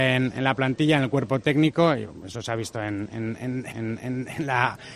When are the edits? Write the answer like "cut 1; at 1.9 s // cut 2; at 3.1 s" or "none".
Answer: cut 1; at 3.7 s